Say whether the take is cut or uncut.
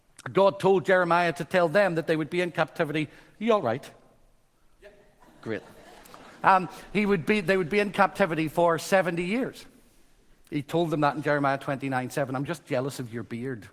uncut